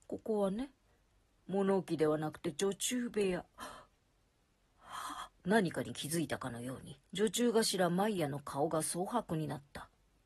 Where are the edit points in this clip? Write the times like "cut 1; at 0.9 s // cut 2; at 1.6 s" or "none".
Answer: cut 1; at 3.5 s // cut 2; at 5.4 s // cut 3; at 7.0 s